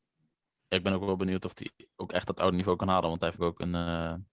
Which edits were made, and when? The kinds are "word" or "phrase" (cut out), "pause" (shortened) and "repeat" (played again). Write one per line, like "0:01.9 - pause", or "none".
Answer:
0:03.4 - word